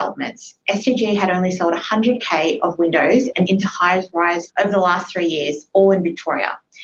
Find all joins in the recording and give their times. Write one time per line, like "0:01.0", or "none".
0:03.5
0:04.5